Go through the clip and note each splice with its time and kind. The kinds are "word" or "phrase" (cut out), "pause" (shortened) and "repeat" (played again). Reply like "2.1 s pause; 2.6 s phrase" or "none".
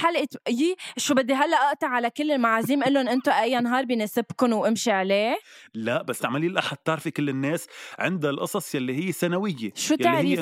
6.2 s word